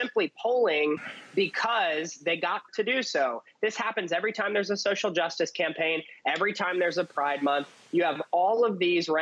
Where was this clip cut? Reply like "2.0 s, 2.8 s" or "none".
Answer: 2.7 s